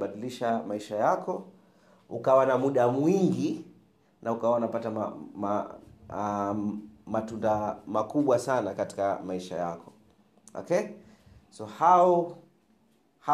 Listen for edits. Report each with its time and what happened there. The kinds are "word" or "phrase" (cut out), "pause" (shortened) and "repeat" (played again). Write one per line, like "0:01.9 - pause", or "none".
none